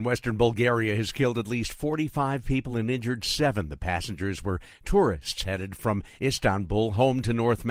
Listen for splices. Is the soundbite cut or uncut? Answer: uncut